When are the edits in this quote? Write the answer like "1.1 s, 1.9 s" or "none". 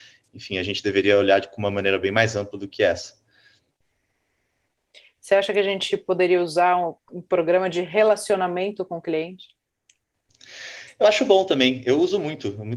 none